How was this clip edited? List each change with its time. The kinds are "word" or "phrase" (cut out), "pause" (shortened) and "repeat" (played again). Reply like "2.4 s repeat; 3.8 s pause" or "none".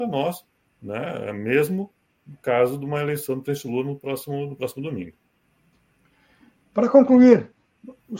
none